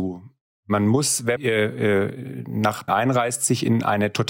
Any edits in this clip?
yes; 2 cuts; at 1.4 s, 2.9 s

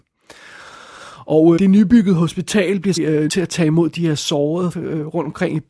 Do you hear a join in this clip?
yes; 4 cuts; at 1.6 s, 3.0 s, 3.3 s, 4.7 s

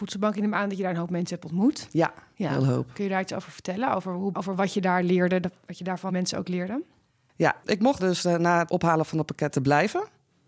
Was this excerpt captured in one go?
no; 5 cuts; at 4.3 s, 6.1 s, 7.6 s, 8.0 s, 8.7 s

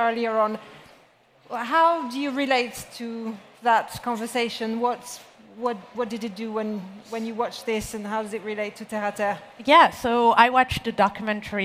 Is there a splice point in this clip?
no; 0 cuts

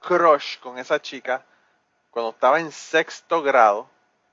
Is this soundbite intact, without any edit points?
yes; 0 cuts

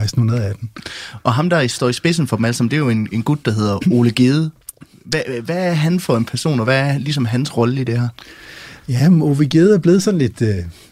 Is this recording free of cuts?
yes; 0 cuts

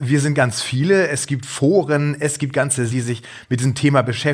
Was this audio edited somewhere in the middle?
yes; 1 cut; at 2.9 s

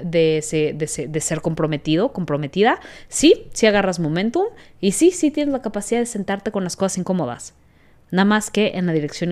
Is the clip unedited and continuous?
yes; 0 cuts

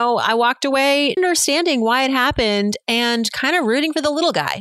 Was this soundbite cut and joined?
yes; 1 cut; at 1.2 s

